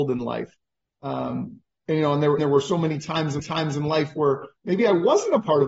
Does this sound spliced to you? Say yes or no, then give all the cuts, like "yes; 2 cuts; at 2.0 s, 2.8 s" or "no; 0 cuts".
yes; 3 cuts; at 2.4 s, 3.4 s, 4.6 s